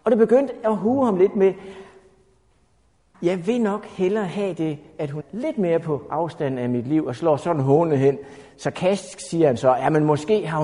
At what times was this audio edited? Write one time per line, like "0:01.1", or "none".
0:03.1
0:05.2

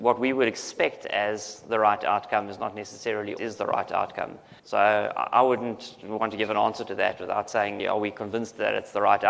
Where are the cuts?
0:03.4
0:04.6
0:07.8

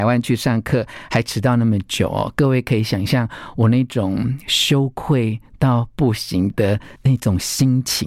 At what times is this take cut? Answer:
0:07.0

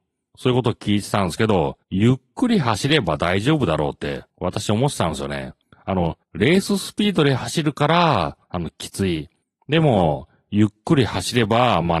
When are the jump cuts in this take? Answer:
0:01.8
0:04.3
0:05.6
0:06.2
0:08.4
0:09.4

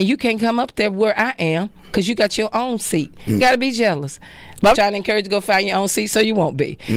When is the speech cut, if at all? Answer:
0:03.4
0:04.7

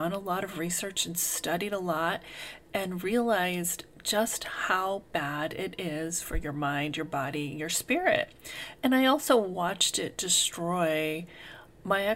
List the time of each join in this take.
0:05.1

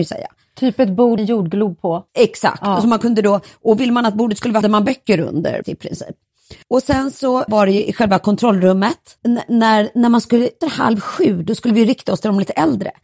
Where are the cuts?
0:01.2
0:02.1
0:04.6
0:05.6
0:06.6
0:07.5
0:09.2
0:10.6

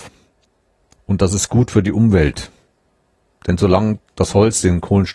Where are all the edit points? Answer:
none

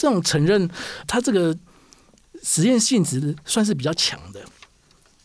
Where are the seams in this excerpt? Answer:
0:01.0

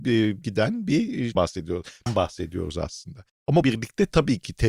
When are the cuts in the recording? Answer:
0:01.4
0:02.1
0:03.6

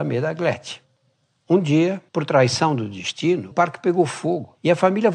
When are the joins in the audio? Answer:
0:02.1
0:03.5

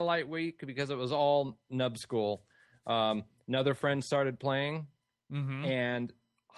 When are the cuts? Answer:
none

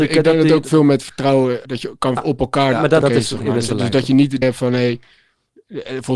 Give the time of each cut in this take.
0:01.6
0:02.2
0:03.0
0:03.7
0:04.4

